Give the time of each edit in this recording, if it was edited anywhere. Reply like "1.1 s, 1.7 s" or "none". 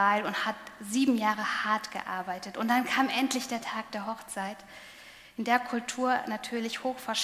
none